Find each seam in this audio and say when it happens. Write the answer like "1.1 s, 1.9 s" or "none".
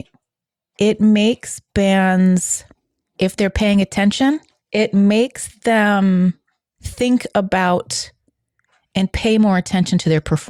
none